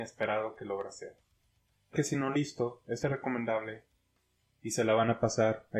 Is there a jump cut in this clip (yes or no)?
yes